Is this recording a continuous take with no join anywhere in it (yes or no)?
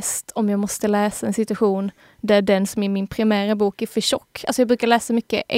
yes